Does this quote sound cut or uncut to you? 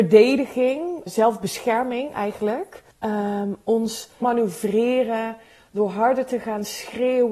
cut